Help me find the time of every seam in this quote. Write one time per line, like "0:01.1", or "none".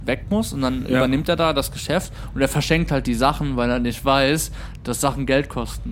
none